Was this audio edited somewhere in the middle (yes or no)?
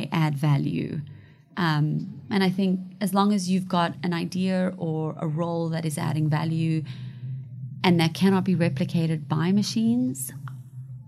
no